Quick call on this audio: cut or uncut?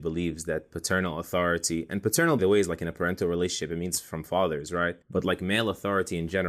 cut